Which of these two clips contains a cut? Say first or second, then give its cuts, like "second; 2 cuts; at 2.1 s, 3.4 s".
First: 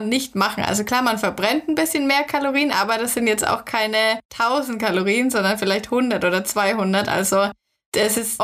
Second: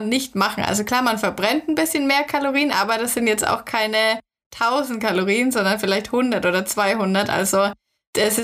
first; 1 cut; at 4.2 s